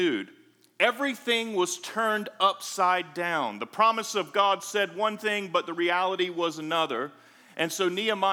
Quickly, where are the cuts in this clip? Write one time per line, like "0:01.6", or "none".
none